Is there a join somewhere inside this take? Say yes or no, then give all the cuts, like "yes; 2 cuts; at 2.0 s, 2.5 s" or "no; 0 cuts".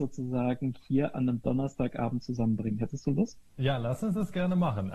no; 0 cuts